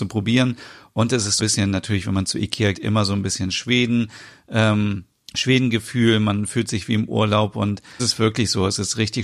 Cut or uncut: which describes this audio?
cut